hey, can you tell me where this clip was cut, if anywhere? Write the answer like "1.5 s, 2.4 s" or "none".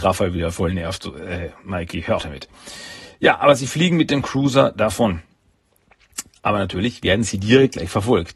2.2 s